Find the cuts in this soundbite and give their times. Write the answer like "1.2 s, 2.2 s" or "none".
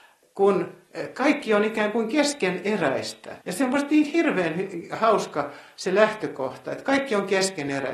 3.4 s